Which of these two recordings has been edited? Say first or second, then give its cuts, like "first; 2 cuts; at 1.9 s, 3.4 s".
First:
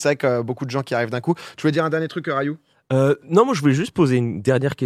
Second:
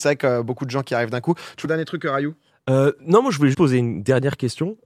second; 2 cuts; at 1.6 s, 3.5 s